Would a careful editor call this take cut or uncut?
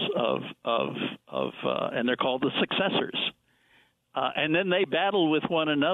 uncut